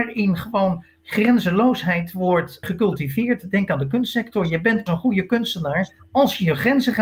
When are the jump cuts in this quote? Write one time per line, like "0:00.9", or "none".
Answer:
0:02.6
0:04.9